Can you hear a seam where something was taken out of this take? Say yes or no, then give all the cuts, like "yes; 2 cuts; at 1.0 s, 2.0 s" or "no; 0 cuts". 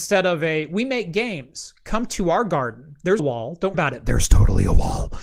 yes; 2 cuts; at 3.2 s, 3.7 s